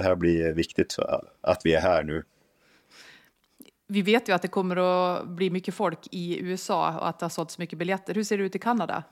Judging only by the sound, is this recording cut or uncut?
uncut